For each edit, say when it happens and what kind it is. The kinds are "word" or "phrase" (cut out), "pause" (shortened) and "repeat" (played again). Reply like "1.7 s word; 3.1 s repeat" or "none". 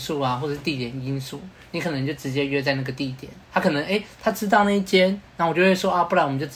3.4 s pause